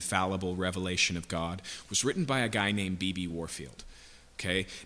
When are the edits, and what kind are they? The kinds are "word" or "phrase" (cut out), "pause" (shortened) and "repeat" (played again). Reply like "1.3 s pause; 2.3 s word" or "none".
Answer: none